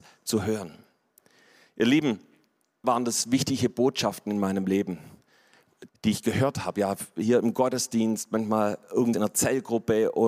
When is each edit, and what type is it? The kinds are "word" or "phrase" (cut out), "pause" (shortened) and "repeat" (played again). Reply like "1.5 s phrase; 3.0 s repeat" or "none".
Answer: 2.8 s word; 5.9 s word; 9.1 s word